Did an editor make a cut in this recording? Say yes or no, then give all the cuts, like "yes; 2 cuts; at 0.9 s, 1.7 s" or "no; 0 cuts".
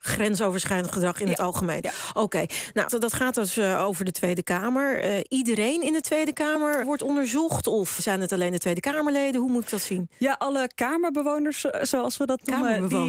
yes; 3 cuts; at 2.9 s, 6.8 s, 8.0 s